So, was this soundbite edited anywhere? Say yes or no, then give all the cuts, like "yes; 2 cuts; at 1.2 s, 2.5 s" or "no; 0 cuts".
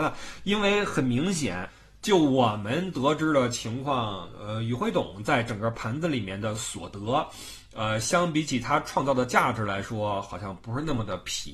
no; 0 cuts